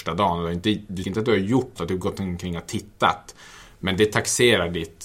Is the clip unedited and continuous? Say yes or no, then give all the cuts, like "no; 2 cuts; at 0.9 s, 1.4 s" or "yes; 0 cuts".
no; 2 cuts; at 1.0 s, 1.8 s